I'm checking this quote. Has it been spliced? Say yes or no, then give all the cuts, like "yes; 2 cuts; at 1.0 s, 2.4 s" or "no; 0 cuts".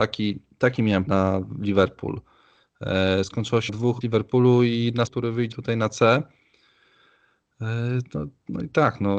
yes; 5 cuts; at 1.1 s, 3.7 s, 4.0 s, 5.1 s, 5.5 s